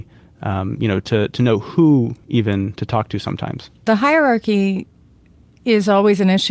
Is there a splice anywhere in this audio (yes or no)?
no